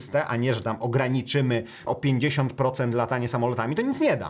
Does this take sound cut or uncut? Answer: cut